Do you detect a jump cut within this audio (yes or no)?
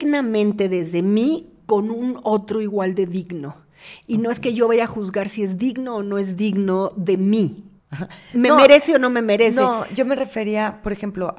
yes